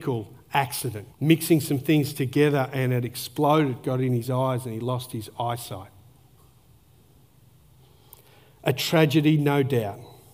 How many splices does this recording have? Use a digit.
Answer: 1